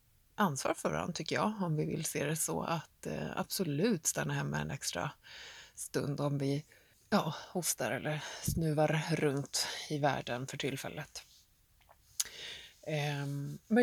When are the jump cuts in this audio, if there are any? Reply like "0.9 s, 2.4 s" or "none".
6.9 s